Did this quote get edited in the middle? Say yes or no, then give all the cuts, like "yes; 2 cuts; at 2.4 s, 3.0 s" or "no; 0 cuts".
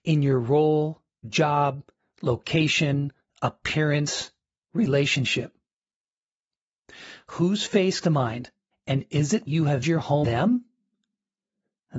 yes; 6 cuts; at 1.2 s, 8.0 s, 8.7 s, 9.5 s, 9.8 s, 10.2 s